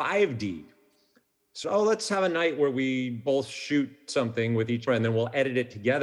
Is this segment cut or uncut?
cut